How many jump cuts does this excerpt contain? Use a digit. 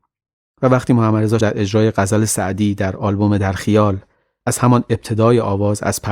1